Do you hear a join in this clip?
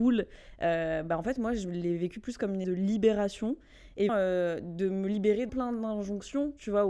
yes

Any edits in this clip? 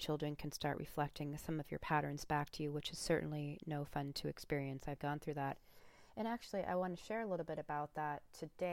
yes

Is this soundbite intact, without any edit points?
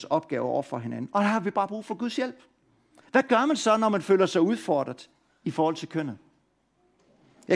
yes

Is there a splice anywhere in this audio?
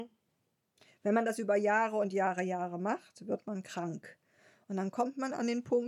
no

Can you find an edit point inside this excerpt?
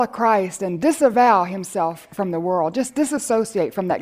no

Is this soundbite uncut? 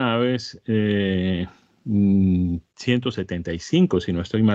no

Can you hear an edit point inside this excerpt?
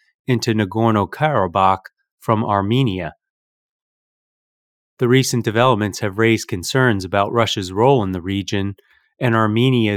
no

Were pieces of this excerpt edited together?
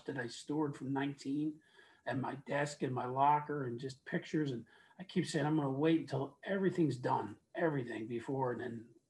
no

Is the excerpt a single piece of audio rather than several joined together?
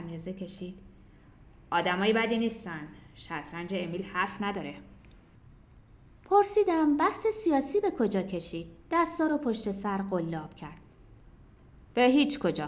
yes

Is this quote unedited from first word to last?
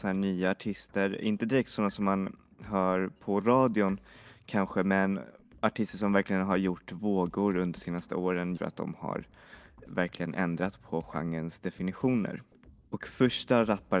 no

